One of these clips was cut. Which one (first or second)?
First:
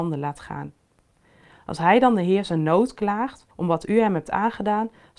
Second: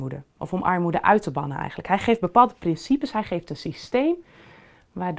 first